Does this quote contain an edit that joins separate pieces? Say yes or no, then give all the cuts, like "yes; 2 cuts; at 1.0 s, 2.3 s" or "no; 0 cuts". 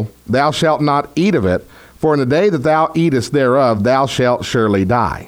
no; 0 cuts